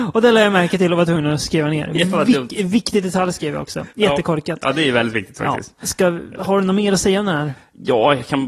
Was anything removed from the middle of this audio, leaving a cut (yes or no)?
no